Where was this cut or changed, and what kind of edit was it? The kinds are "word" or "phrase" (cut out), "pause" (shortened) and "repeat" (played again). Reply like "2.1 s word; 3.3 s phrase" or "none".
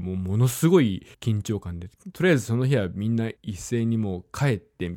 1.1 s pause; 3.4 s pause

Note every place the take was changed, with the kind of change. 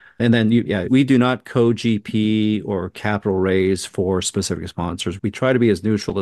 none

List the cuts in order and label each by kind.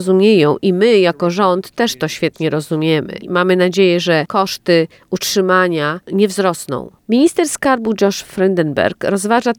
none

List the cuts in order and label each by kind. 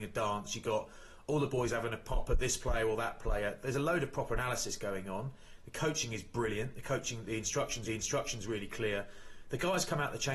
7.9 s repeat

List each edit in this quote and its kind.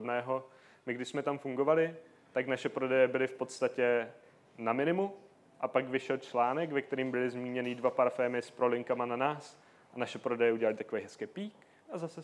none

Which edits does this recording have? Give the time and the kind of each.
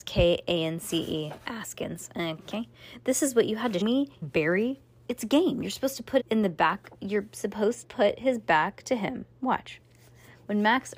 3.8 s word; 4.2 s word; 6.2 s word; 7.8 s word

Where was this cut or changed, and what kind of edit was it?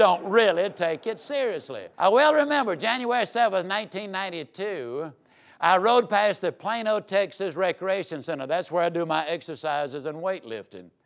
1.9 s pause

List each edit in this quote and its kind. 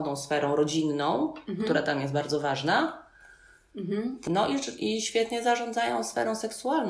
none

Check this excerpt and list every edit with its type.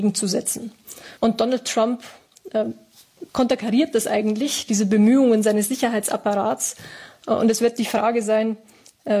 1.2 s pause; 3.3 s pause

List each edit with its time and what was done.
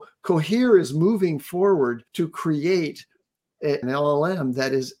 2.1 s pause; 3.8 s phrase

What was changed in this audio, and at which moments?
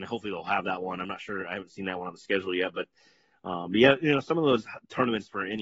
none

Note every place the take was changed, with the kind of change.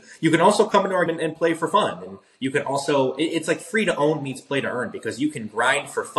1.1 s word

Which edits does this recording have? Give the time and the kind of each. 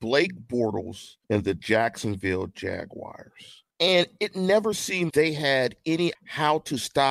1.2 s pause; 3.7 s pause; 5.1 s word; 6.1 s word

